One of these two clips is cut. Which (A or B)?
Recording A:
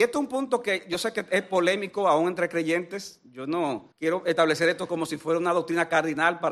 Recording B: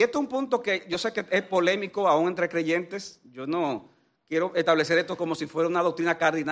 A